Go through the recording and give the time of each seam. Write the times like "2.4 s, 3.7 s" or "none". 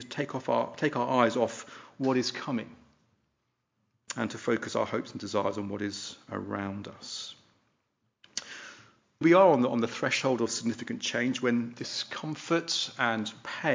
9.2 s